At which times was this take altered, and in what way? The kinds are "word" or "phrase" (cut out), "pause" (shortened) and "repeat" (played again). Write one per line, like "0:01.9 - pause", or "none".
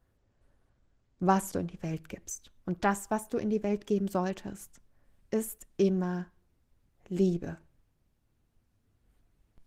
0:01.5 - phrase
0:02.6 - pause